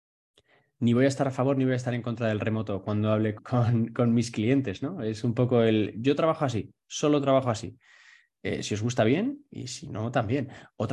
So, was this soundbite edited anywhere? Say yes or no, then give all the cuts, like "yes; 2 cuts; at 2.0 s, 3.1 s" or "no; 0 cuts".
yes; 1 cut; at 3.4 s